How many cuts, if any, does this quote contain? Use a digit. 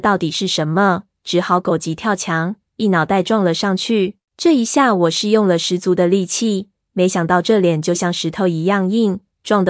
1